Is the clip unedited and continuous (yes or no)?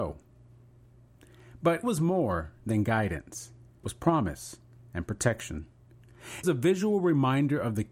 no